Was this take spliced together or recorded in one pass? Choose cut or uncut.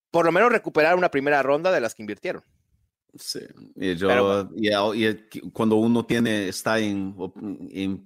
uncut